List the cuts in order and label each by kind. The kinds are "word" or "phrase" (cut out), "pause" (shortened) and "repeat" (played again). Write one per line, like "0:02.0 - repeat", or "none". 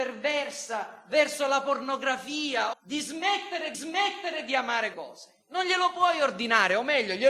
0:02.7 - phrase
0:03.7 - repeat
0:04.9 - word